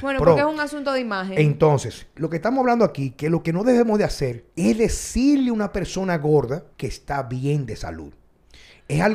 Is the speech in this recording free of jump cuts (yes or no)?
no